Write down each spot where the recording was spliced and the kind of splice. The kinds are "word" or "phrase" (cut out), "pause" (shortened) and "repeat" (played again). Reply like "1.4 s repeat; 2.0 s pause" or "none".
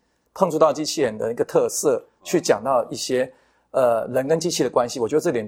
none